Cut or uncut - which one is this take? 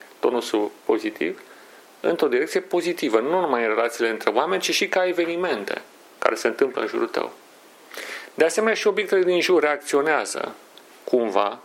uncut